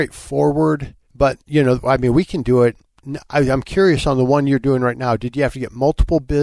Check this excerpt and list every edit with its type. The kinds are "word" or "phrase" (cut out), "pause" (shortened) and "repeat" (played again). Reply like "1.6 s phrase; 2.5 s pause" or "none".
1.0 s pause

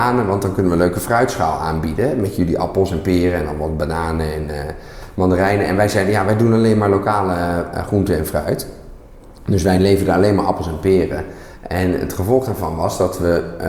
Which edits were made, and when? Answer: none

